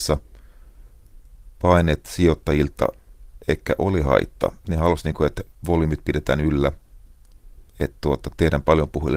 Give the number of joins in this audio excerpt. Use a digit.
1